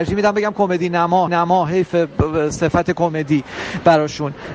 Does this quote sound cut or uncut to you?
cut